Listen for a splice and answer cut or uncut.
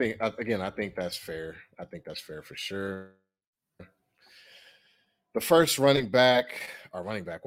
uncut